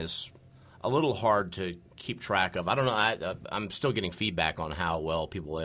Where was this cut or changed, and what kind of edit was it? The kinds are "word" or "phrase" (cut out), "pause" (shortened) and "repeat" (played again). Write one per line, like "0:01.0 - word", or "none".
0:01.9 - pause